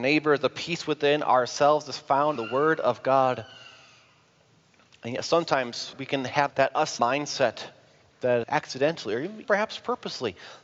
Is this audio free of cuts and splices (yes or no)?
no